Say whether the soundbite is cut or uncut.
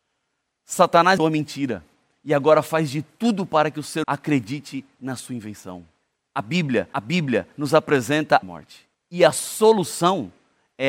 cut